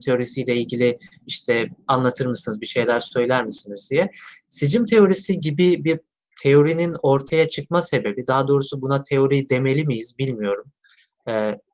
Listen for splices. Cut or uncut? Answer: uncut